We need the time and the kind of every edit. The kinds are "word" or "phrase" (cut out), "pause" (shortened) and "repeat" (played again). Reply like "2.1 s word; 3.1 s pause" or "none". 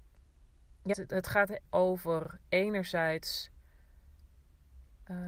0.9 s word; 1.6 s word